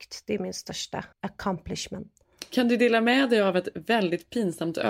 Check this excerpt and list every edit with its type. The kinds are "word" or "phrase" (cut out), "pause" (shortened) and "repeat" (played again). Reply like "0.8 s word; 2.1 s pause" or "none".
1.1 s pause